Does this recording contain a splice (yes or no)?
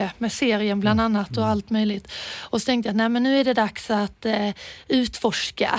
no